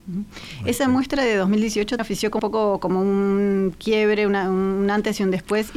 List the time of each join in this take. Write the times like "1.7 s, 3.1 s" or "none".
2.0 s, 2.4 s